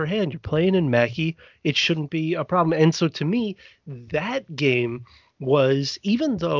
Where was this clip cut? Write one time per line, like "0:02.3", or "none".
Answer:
none